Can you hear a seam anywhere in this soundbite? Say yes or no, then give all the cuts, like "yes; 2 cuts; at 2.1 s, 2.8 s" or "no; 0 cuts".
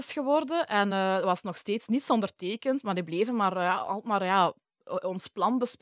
no; 0 cuts